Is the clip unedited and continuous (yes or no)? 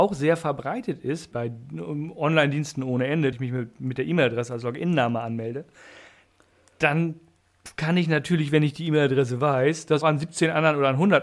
no